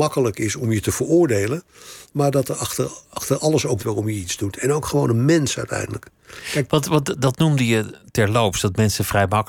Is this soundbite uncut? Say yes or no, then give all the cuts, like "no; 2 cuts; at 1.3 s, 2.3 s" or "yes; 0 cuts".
no; 2 cuts; at 3.0 s, 3.8 s